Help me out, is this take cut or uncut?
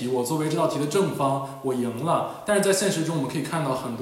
uncut